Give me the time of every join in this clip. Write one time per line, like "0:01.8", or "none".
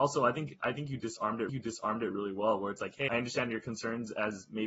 0:01.5
0:03.1

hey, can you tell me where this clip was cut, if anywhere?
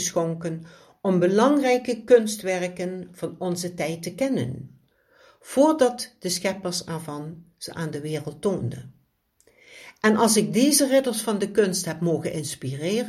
none

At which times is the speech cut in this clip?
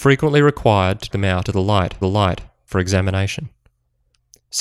0:01.1
0:01.4
0:02.0

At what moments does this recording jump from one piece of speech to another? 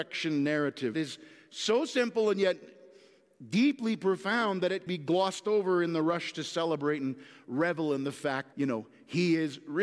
0:00.9
0:04.9
0:08.5

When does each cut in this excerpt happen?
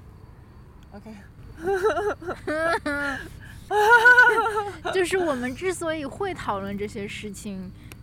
0:03.7

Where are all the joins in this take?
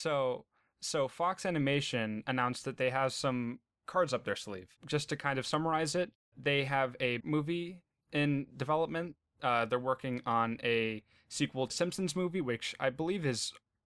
0:04.8
0:07.2
0:11.7

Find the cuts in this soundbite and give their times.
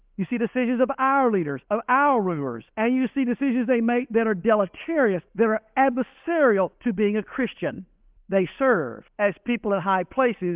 0:01.6
0:02.7
0:05.3
0:06.7
0:08.2
0:09.1

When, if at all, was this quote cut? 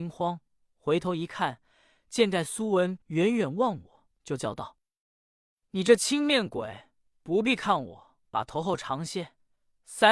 0:03.0
0:04.1
0:08.2

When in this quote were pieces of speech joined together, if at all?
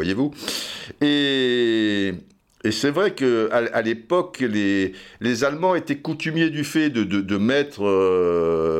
none

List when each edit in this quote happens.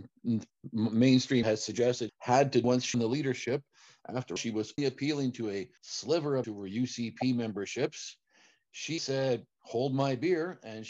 0:01.4
0:02.1
0:02.6
0:02.9
0:04.4
0:04.8
0:05.8
0:06.4
0:09.0

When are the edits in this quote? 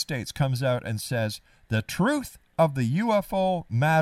none

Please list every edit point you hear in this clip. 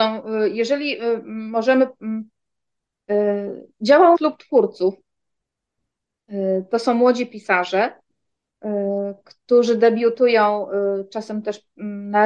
0:03.7
0:04.1

